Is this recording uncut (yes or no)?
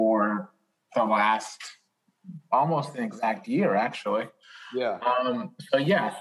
yes